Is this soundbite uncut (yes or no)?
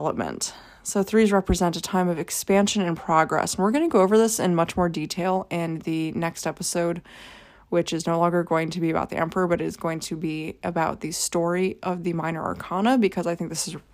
yes